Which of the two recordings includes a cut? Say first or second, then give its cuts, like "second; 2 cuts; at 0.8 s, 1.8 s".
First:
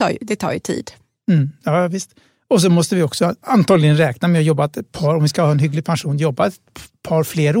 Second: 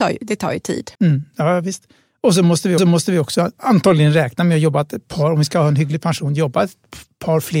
second; 2 cuts; at 0.9 s, 2.8 s